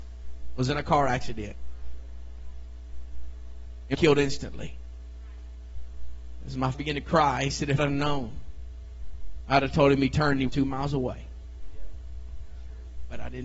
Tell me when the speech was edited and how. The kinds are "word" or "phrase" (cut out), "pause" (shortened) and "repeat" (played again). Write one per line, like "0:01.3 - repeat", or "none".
0:03.9 - word
0:06.7 - word
0:07.8 - word
0:10.5 - word